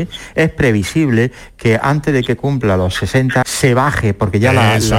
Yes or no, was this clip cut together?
yes